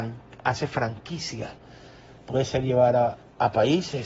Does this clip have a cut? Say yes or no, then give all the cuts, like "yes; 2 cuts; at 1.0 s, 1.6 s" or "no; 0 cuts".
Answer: no; 0 cuts